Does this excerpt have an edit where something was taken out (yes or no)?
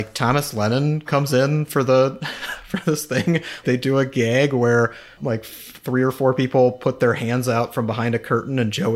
yes